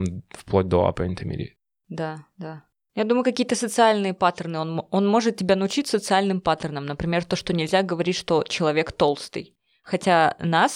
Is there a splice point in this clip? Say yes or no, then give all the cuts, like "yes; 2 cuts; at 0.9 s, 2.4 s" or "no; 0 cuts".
no; 0 cuts